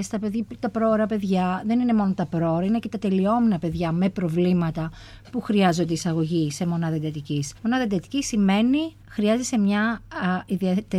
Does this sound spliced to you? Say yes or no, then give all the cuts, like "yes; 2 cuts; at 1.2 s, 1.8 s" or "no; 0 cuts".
yes; 2 cuts; at 7.6 s, 9.0 s